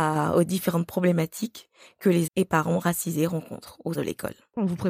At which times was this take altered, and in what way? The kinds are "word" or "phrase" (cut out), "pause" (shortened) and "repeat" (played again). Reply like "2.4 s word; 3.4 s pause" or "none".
2.3 s word; 3.9 s word